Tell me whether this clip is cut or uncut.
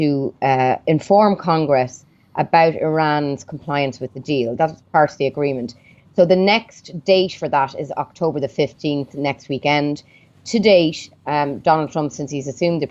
uncut